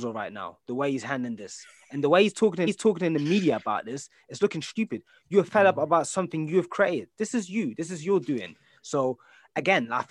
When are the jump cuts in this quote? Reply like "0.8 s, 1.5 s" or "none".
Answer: 2.7 s, 4.4 s